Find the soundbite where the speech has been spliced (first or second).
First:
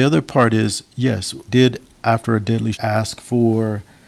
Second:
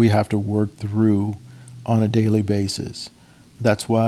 first